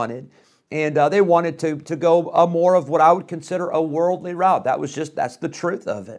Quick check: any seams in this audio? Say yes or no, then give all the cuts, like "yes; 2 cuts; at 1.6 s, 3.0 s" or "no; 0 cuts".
no; 0 cuts